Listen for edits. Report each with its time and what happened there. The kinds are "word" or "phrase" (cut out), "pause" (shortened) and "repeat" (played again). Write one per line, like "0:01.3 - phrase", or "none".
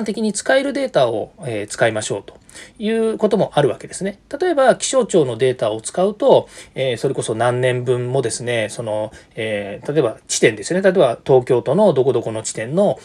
0:10.2 - pause